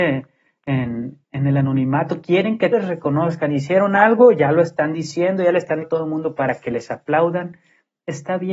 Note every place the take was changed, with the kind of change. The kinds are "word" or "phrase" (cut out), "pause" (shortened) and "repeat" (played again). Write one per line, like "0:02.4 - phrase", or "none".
0:02.7 - word
0:05.8 - word